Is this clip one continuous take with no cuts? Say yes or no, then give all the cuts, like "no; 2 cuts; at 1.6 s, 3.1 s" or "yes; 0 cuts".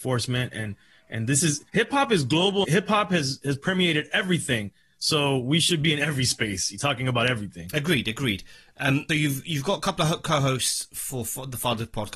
no; 3 cuts; at 1.7 s, 2.6 s, 9.1 s